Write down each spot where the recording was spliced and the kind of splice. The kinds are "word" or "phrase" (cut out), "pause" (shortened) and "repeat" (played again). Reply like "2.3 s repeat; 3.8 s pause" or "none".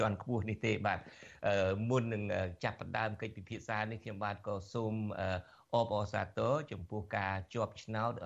none